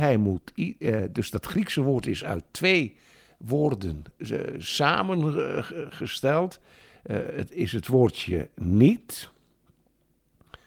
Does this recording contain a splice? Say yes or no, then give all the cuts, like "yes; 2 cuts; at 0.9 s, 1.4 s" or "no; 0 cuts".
no; 0 cuts